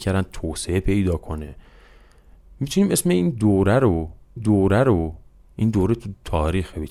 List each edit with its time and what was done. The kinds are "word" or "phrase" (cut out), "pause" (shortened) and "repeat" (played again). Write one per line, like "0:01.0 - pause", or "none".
0:04.4 - repeat